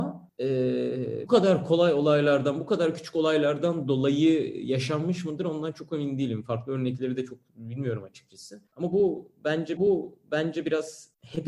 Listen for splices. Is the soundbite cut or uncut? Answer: cut